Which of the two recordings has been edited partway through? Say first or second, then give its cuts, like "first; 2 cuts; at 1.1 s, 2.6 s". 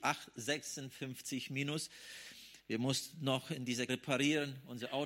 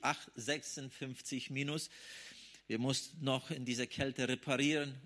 first; 1 cut; at 3.9 s